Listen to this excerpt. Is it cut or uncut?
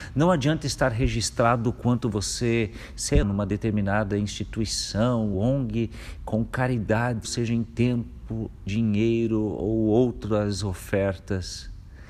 cut